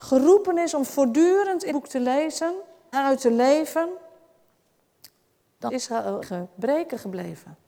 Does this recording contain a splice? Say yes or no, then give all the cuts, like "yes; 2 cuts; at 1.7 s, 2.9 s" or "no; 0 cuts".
yes; 4 cuts; at 1.7 s, 2.9 s, 5.7 s, 6.2 s